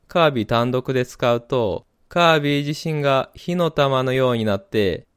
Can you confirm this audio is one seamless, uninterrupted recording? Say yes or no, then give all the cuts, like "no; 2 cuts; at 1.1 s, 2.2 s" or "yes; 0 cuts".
yes; 0 cuts